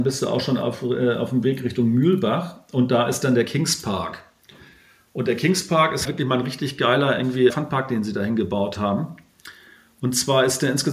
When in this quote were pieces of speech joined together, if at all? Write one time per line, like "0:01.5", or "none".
0:06.0
0:07.5